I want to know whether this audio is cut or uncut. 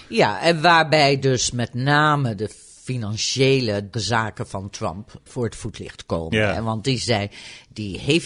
cut